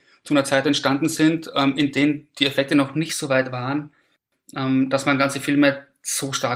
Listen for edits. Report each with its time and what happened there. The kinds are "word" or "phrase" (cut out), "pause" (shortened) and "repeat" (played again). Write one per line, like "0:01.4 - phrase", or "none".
none